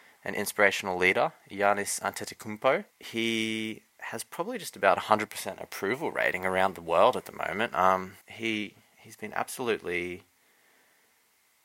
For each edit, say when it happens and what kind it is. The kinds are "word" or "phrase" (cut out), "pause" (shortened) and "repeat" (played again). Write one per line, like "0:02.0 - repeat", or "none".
0:02.9 - pause
0:08.2 - pause